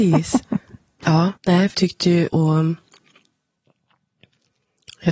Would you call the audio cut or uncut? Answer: cut